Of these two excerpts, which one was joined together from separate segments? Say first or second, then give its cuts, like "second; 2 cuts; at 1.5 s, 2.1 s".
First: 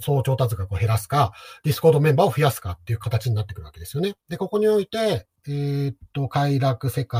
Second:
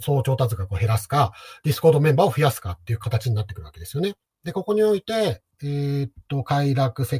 first; 1 cut; at 4.2 s